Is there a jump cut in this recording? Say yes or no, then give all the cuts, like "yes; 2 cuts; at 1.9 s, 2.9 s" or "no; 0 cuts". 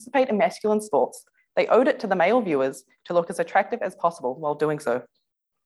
no; 0 cuts